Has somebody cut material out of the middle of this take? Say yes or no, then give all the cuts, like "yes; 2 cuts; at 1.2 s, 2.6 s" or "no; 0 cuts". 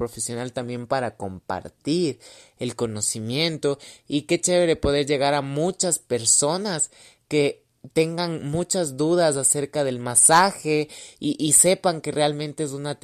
no; 0 cuts